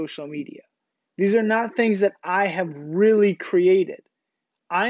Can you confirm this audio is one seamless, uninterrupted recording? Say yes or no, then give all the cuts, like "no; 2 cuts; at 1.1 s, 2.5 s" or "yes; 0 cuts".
yes; 0 cuts